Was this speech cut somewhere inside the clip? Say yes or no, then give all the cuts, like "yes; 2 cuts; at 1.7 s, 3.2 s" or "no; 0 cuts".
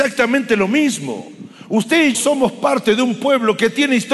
yes; 1 cut; at 2.1 s